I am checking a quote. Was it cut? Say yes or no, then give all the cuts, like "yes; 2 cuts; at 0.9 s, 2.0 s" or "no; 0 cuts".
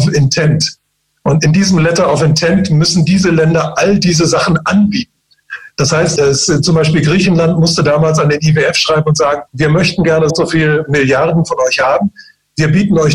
yes; 3 cuts; at 6.2 s, 9.5 s, 10.3 s